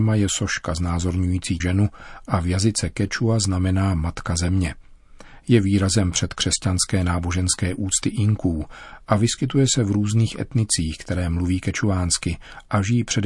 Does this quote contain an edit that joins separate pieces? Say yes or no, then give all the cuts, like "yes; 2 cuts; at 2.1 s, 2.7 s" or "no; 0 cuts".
yes; 1 cut; at 1.6 s